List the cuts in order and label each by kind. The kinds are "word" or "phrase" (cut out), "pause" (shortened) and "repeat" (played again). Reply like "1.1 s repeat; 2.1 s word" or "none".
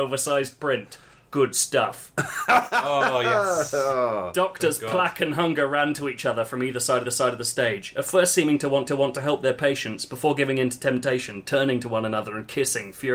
7.0 s repeat; 8.9 s repeat

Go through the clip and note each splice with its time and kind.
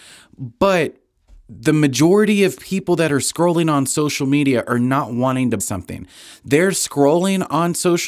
5.6 s word

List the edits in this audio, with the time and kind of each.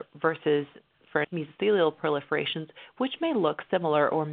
1.2 s word

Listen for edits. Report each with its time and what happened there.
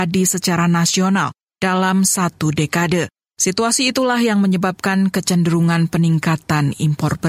none

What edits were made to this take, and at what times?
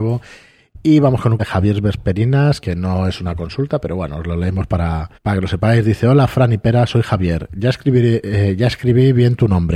1.4 s word; 2.6 s word; 5.1 s pause

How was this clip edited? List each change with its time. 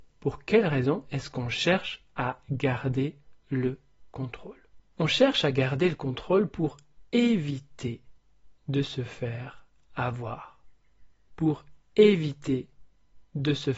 none

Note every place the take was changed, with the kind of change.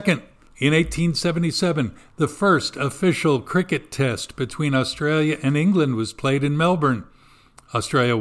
none

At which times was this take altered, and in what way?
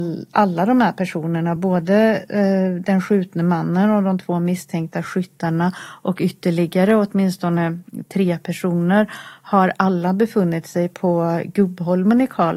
none

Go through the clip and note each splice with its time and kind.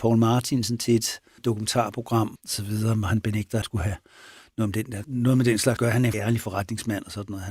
1.4 s word; 2.4 s word; 3.6 s word; 5.0 s word; 5.8 s word; 6.1 s word

